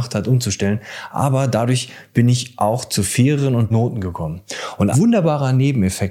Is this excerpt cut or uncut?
cut